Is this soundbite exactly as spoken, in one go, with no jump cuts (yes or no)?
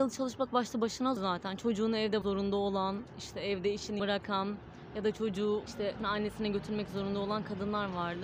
no